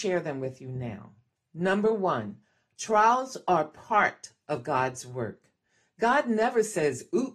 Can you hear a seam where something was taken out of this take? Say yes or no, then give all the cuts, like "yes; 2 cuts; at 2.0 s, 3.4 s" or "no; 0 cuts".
no; 0 cuts